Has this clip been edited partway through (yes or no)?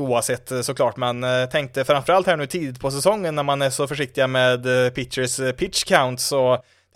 no